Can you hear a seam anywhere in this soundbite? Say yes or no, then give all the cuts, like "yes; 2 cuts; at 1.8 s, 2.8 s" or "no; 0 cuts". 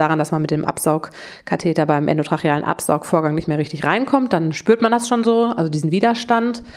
no; 0 cuts